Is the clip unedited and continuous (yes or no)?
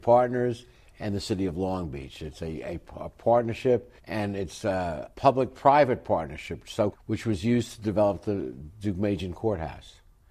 no